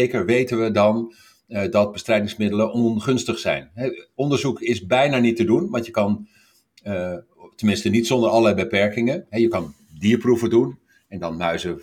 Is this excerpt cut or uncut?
uncut